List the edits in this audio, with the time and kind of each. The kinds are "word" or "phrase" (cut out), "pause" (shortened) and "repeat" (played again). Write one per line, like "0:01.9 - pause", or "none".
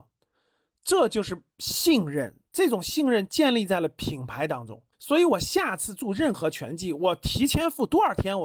0:04.9 - pause

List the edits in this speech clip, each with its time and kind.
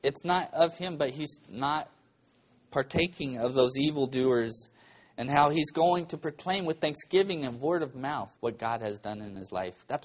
0:08.4 - pause

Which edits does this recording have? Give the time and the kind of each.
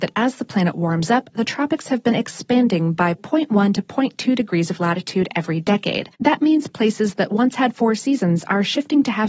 0:06.1 - pause

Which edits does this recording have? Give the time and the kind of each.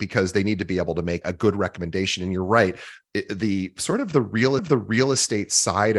0:01.2 - word
0:04.6 - repeat

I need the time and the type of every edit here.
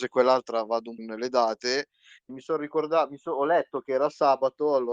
0:01.0 - phrase
0:02.3 - word

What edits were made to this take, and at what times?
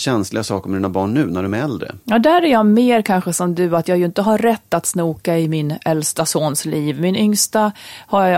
0:02.0 - pause

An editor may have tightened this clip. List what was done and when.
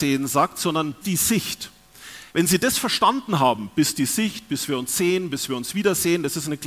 0:01.0 - word
0:02.3 - pause

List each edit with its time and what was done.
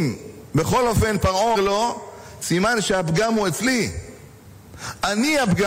0:01.6 - word

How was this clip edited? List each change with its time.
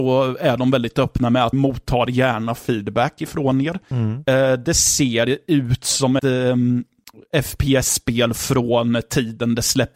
0:01.5 - word
0:06.2 - word

